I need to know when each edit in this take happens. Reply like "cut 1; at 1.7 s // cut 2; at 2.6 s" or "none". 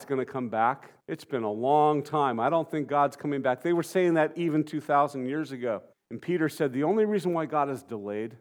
cut 1; at 1.0 s // cut 2; at 5.9 s